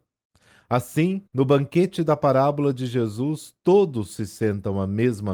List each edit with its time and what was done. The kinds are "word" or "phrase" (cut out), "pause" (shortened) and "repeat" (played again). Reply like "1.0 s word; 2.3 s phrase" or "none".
1.3 s pause

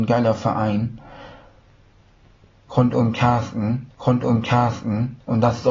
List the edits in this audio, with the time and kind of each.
3.9 s repeat

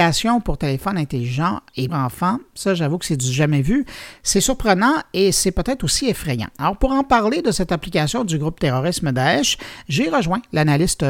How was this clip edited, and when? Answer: 1.9 s word

